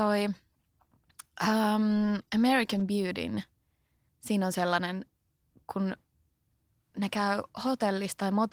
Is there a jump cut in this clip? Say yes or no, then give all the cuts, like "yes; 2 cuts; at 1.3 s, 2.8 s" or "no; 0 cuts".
yes; 1 cut; at 2.3 s